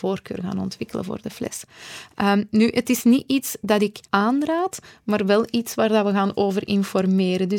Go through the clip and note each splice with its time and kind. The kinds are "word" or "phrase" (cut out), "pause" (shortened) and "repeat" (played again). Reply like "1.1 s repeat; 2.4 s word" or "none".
4.0 s pause